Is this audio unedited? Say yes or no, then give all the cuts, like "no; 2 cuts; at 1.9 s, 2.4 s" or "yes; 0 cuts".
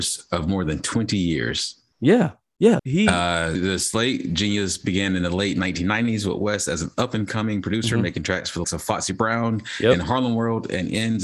no; 3 cuts; at 2.8 s, 3.5 s, 8.6 s